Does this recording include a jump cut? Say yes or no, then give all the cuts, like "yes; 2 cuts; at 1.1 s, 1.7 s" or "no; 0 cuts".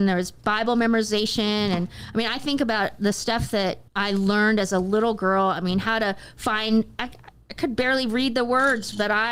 yes; 1 cut; at 3.9 s